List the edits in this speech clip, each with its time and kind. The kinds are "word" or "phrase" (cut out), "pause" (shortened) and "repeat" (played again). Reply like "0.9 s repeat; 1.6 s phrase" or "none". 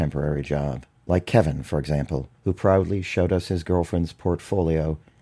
1.0 s pause; 2.4 s pause